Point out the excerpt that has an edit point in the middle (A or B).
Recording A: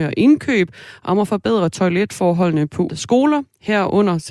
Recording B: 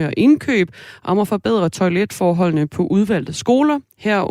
A